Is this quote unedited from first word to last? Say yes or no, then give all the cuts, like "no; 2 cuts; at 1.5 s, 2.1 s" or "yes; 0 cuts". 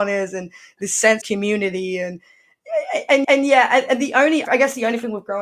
no; 3 cuts; at 1.2 s, 3.2 s, 4.4 s